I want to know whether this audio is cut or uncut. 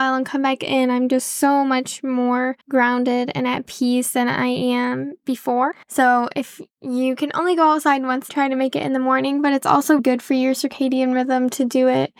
cut